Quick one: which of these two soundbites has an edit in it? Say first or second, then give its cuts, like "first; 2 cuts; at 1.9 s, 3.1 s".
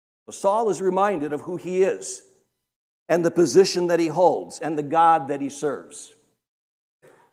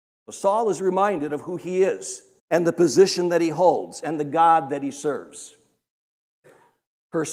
second; 1 cut; at 2.4 s